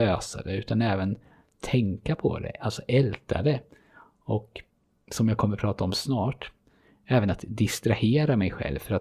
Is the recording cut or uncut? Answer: uncut